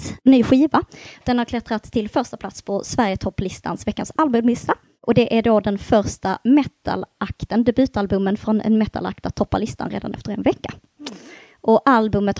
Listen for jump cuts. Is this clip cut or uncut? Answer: uncut